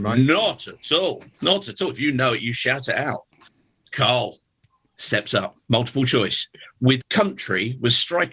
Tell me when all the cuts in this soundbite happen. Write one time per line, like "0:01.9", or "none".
0:07.0